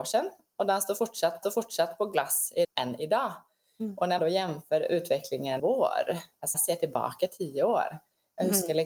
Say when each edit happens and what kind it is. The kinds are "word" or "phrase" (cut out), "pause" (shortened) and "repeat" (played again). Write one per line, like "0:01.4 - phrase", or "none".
0:01.4 - repeat
0:02.6 - word
0:04.2 - word
0:05.6 - phrase
0:06.5 - word